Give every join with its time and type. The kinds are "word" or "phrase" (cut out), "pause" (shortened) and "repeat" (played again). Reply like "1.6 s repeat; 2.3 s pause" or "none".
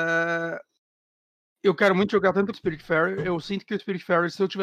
2.5 s phrase